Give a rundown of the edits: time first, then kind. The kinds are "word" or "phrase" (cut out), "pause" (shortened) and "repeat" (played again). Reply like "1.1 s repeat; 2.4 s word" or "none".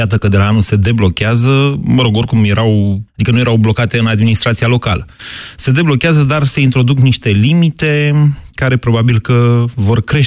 3.1 s pause